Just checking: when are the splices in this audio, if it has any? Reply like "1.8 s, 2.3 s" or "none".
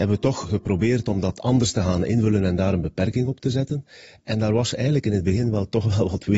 none